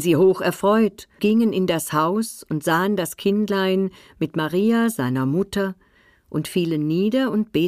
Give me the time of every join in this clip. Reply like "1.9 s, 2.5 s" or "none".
1.2 s